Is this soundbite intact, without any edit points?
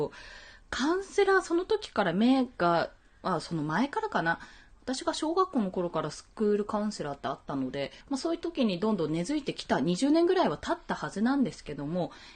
no; 1 cut; at 8.0 s

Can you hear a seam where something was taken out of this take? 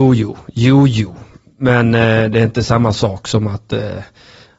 no; 0 cuts

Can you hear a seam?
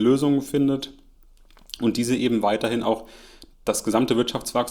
yes; 1 cut; at 3.5 s

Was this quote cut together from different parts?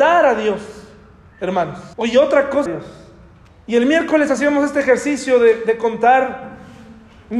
yes; 3 cuts; at 1.9 s, 2.7 s, 3.5 s

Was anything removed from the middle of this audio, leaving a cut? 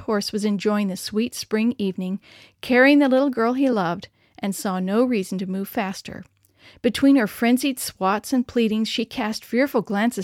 no; 0 cuts

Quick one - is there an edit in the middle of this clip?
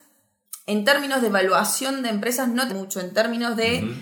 yes; 1 cut; at 2.7 s

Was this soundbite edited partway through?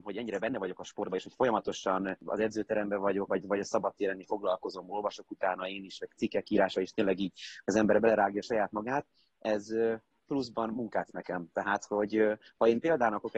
yes; 3 cuts; at 3.3 s, 4.2 s, 11.1 s

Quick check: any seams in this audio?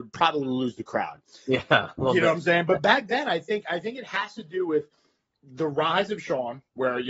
no; 0 cuts

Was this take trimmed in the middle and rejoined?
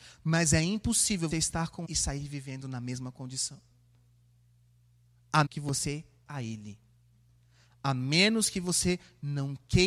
yes; 4 cuts; at 1.3 s, 1.8 s, 5.5 s, 6.3 s

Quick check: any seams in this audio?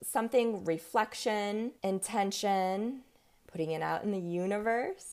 yes; 1 cut; at 1.8 s

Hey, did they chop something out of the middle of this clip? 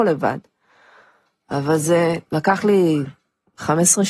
yes; 1 cut; at 2.2 s

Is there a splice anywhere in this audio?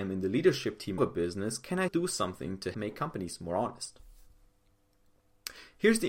yes; 3 cuts; at 1.0 s, 1.9 s, 2.7 s

